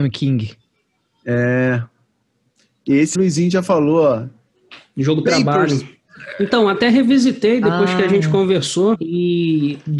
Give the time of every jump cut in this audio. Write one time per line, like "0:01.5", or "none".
0:03.1
0:08.9